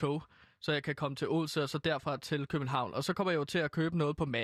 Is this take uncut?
yes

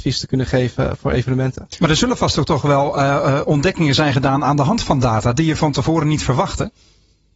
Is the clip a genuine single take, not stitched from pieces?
yes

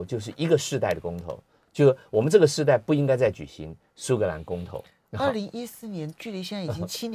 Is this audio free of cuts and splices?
yes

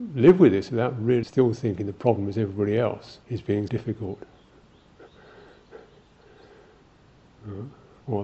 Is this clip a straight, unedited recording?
no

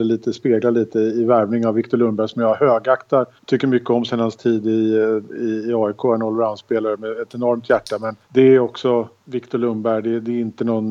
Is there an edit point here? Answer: yes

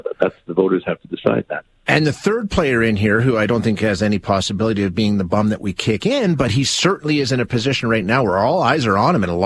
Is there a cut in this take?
no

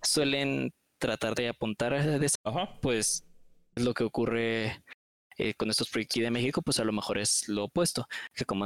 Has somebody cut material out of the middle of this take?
yes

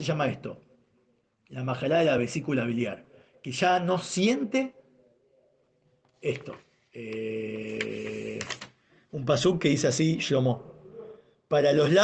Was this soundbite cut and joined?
no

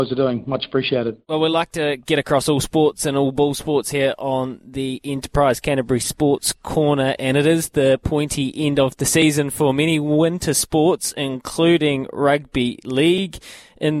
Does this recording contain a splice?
no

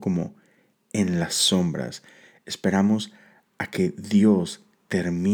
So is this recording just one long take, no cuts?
yes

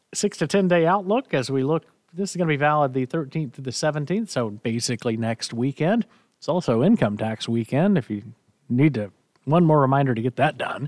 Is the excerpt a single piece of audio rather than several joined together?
yes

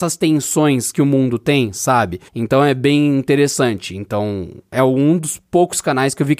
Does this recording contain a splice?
yes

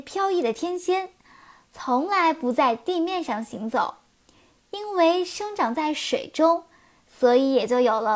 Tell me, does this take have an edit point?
no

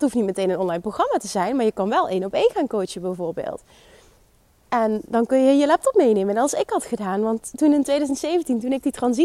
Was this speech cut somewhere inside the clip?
no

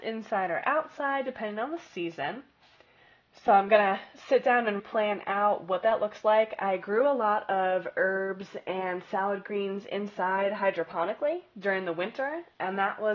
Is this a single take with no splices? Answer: no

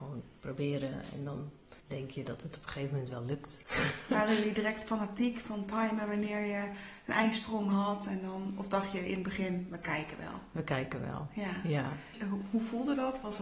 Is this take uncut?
no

